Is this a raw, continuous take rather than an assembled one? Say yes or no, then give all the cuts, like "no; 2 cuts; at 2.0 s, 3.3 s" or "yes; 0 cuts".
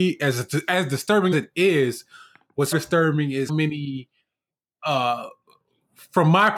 no; 3 cuts; at 1.3 s, 2.7 s, 3.5 s